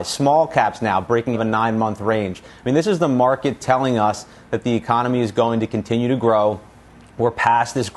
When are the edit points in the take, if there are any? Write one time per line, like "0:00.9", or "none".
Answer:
0:01.3